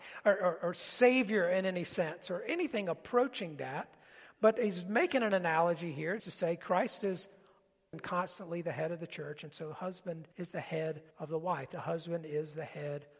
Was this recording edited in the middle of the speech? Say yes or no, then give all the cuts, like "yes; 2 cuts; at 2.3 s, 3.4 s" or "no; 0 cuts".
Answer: yes; 4 cuts; at 6.2 s, 7.9 s, 10.3 s, 11.1 s